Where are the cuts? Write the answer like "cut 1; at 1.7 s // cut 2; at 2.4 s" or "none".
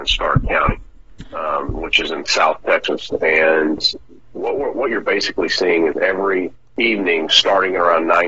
cut 1; at 6.6 s